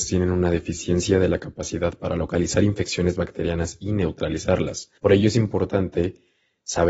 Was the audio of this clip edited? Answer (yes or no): yes